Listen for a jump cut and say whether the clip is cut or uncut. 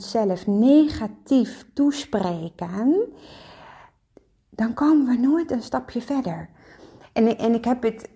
uncut